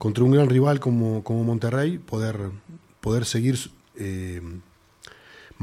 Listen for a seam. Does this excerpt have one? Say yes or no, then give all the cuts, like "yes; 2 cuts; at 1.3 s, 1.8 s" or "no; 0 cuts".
no; 0 cuts